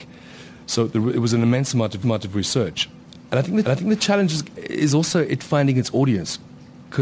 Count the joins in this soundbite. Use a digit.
2